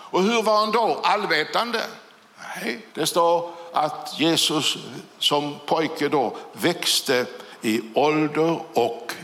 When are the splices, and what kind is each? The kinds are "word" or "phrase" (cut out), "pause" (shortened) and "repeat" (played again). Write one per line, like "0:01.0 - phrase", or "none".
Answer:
0:02.9 - pause